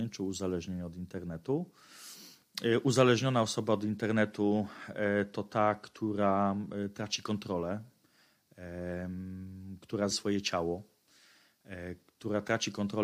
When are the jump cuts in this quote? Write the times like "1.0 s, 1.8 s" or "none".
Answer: 10.1 s